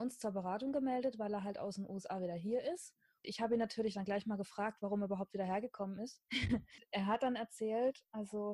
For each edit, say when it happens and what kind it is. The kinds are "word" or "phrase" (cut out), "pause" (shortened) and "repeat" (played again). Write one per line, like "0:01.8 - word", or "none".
0:06.3 - pause